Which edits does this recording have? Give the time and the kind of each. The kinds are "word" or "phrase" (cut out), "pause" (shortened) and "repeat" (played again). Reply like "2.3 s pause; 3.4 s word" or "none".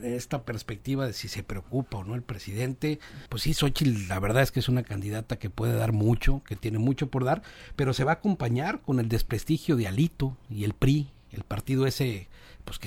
3.3 s pause